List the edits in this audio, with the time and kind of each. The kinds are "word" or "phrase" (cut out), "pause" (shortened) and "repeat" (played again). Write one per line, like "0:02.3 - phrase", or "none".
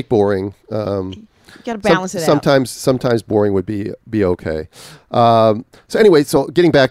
none